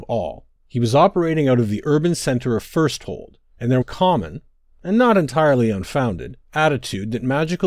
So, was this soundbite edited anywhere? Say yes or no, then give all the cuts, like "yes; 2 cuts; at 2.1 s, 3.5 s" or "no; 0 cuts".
yes; 2 cuts; at 3.8 s, 6.4 s